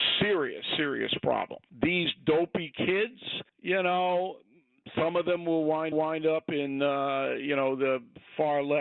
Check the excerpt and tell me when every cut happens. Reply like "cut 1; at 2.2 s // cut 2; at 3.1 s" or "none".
cut 1; at 1.7 s // cut 2; at 3.5 s // cut 3; at 5.9 s